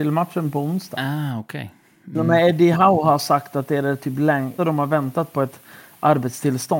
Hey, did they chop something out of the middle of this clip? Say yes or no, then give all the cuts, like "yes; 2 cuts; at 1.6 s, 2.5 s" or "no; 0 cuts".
yes; 1 cut; at 4.6 s